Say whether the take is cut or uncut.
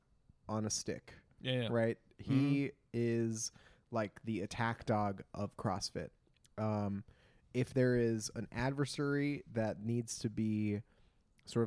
uncut